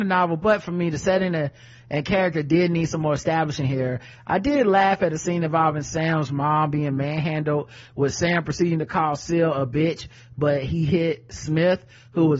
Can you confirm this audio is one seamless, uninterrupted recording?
yes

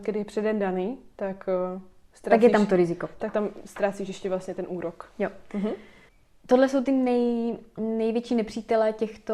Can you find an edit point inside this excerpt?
no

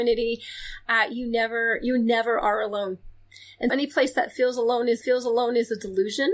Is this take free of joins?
no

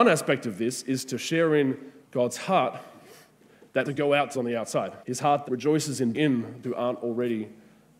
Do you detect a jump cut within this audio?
yes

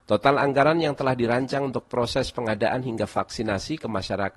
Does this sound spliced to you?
no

